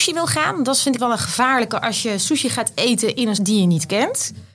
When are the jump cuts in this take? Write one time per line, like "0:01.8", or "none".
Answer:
0:01.0
0:03.4